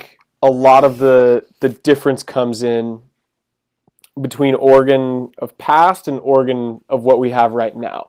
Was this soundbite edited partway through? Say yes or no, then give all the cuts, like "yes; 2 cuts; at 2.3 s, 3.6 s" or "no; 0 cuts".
no; 0 cuts